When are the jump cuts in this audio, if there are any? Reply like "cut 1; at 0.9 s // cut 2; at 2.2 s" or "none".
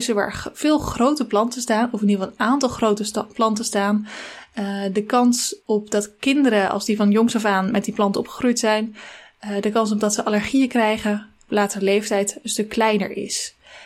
cut 1; at 5.6 s